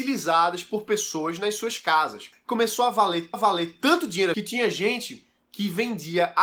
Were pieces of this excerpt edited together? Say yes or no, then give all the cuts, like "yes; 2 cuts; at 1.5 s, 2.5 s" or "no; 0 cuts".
yes; 2 cuts; at 3.3 s, 4.3 s